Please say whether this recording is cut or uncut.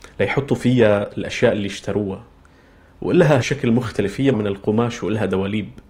cut